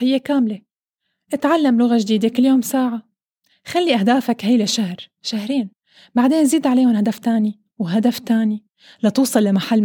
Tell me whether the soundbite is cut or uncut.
uncut